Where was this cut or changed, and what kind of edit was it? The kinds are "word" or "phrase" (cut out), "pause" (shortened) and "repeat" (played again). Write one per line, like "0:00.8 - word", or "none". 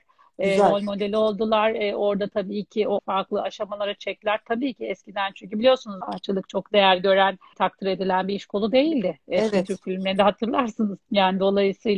0:03.0 - word
0:06.0 - word
0:07.5 - word
0:11.0 - pause